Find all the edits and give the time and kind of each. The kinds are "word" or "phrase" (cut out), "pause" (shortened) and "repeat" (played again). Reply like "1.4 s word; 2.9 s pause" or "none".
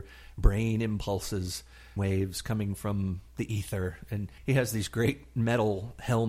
2.0 s word; 3.3 s pause; 4.4 s pause